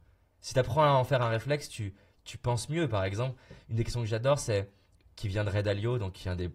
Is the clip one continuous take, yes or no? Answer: yes